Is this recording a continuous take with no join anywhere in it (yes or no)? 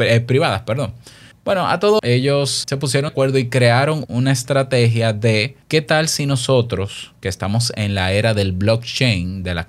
no